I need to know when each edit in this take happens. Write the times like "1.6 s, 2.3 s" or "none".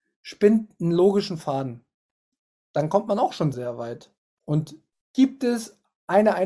3.5 s